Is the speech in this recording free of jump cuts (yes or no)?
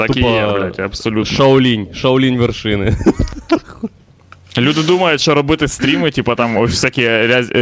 yes